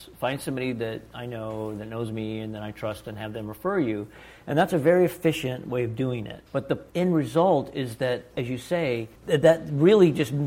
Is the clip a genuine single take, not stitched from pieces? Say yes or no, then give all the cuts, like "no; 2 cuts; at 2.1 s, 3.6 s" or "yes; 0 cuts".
no; 3 cuts; at 6.5 s, 6.9 s, 9.1 s